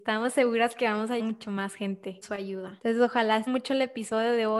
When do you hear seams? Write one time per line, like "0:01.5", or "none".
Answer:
0:01.2
0:02.2
0:03.5